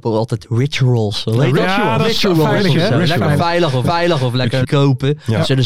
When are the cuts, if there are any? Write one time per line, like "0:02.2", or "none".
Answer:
0:03.8
0:04.6